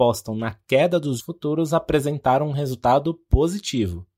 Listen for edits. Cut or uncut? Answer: cut